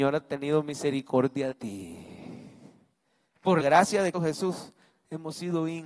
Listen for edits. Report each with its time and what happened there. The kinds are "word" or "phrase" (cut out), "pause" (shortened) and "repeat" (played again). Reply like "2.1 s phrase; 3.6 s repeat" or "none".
1.5 s word; 3.6 s word; 4.1 s word